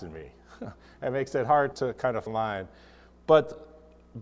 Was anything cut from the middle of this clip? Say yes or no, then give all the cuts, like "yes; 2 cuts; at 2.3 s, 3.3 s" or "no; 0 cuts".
yes; 2 cuts; at 1.7 s, 2.3 s